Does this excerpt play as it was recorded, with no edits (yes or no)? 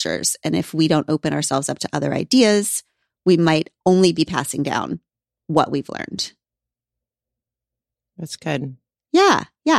yes